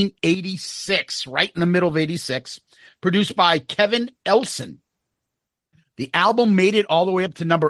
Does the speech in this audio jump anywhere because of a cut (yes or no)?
no